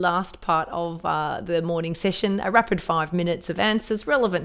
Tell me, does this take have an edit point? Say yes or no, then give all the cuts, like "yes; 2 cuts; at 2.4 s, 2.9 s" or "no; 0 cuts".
no; 0 cuts